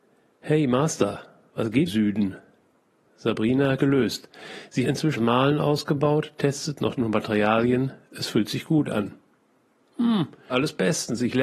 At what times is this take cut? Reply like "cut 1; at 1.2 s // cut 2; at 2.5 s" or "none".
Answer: cut 1; at 1.9 s // cut 2; at 3.8 s // cut 3; at 4.8 s // cut 4; at 5.2 s // cut 5; at 7.0 s // cut 6; at 10.5 s